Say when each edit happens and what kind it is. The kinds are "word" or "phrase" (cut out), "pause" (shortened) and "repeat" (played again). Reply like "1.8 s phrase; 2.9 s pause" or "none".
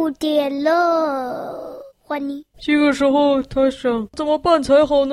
1.9 s pause; 2.5 s pause